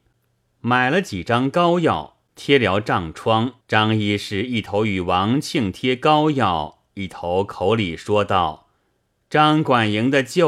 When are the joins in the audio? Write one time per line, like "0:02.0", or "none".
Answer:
0:02.3
0:03.6
0:08.8